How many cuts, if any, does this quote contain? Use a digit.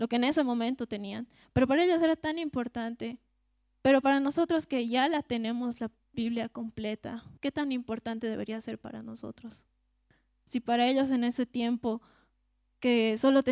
1